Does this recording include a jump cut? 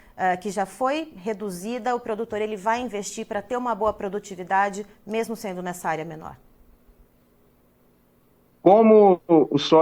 no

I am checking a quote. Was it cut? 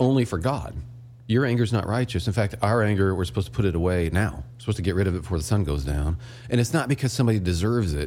yes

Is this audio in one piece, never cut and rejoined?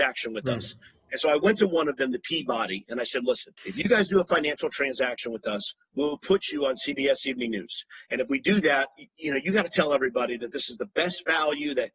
no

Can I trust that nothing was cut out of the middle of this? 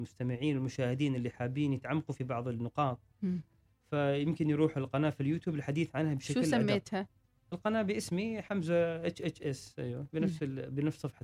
yes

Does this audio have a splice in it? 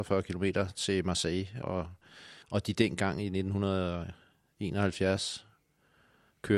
yes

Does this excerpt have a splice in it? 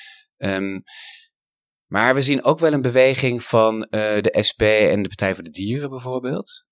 no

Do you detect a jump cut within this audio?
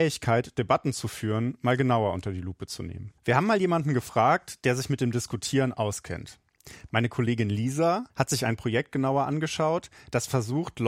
yes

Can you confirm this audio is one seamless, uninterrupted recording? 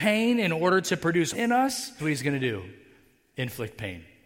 no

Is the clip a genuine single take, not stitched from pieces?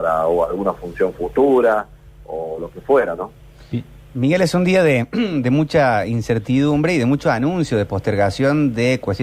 yes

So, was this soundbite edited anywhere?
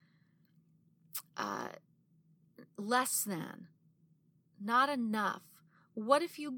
no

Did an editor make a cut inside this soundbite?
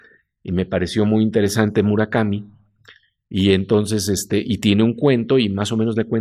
no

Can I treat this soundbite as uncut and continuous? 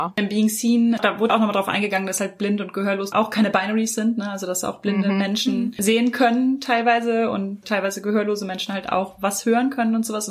yes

